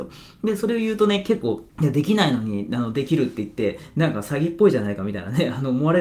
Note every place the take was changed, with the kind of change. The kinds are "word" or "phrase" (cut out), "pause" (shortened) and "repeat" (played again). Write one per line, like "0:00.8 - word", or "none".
0:01.7 - pause